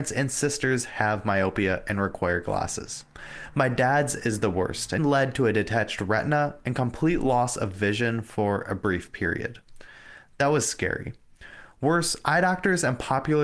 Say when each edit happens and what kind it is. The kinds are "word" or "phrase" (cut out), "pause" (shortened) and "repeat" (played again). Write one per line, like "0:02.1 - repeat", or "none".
0:05.0 - word

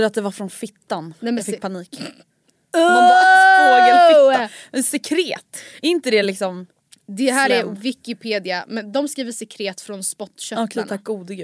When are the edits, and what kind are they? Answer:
none

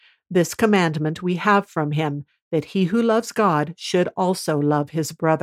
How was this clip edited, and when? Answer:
none

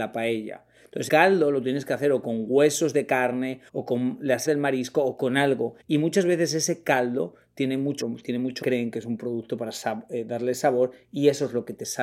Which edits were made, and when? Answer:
0:01.1 - word
0:03.7 - pause
0:04.5 - word
0:05.8 - pause
0:08.0 - word
0:08.6 - word

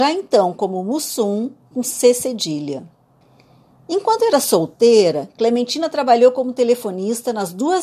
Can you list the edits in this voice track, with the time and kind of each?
0:03.2 - pause

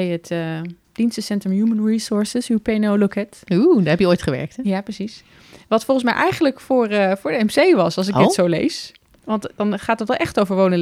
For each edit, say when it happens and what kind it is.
none

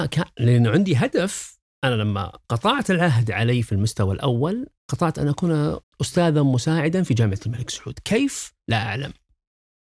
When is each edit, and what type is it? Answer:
0:01.6 - pause
0:02.4 - pause
0:04.8 - pause
0:05.8 - pause

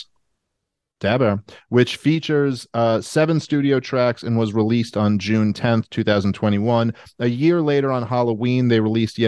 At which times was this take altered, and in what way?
none

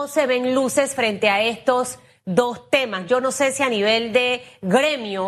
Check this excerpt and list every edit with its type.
none

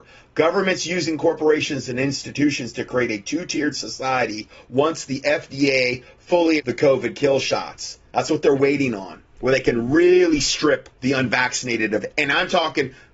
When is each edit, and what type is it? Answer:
0:06.6 - word
0:09.3 - pause
0:10.9 - pause

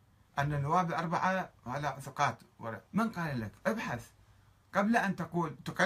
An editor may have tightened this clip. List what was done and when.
0:02.9 - pause

